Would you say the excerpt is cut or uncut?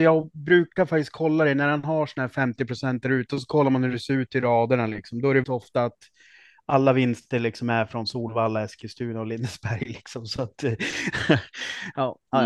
cut